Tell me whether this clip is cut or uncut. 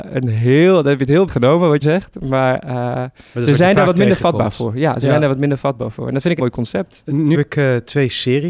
cut